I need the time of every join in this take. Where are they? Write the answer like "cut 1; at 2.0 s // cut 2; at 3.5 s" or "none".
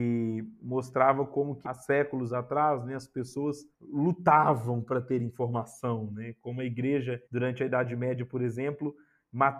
cut 1; at 1.6 s // cut 2; at 3.7 s // cut 3; at 7.3 s